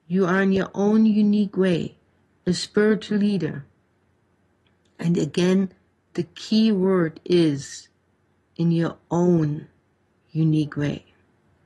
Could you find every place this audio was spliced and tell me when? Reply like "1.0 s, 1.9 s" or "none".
none